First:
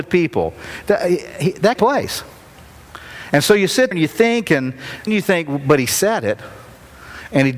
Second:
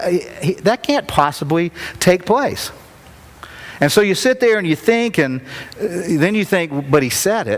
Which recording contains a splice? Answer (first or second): first